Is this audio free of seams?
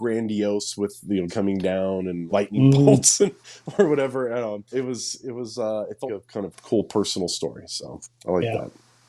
no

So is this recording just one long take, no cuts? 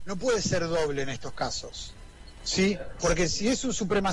yes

